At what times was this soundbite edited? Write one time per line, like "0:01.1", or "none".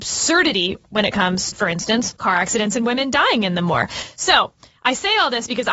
0:01.5
0:02.2